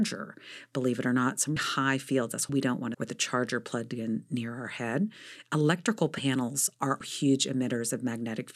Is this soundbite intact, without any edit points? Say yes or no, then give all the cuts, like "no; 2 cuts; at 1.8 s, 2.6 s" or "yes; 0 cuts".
no; 4 cuts; at 1.6 s, 2.5 s, 2.9 s, 7.0 s